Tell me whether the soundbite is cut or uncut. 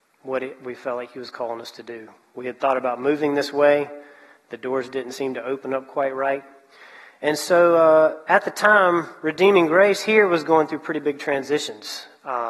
uncut